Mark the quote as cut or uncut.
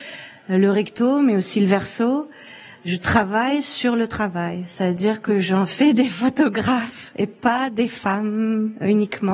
uncut